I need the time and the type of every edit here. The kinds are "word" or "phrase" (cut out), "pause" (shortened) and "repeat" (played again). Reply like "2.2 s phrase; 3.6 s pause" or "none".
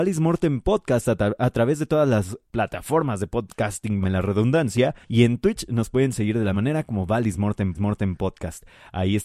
2.4 s pause; 4.0 s word; 5.0 s pause; 6.5 s word; 7.7 s repeat